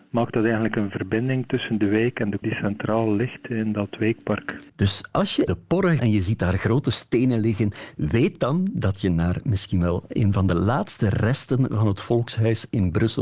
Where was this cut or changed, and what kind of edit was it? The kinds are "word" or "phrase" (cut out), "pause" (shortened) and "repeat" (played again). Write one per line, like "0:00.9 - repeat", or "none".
0:02.4 - word
0:04.7 - pause
0:05.5 - word
0:06.0 - phrase